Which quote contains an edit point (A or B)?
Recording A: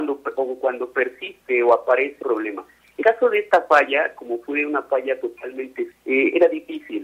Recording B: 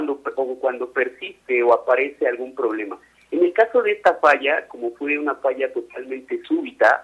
A